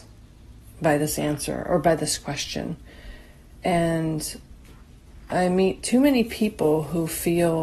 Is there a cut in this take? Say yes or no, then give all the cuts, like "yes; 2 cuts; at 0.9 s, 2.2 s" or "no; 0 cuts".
no; 0 cuts